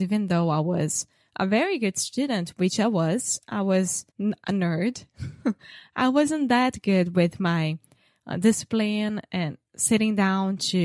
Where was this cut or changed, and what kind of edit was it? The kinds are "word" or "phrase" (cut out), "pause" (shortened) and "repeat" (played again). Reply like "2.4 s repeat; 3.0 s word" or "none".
4.1 s pause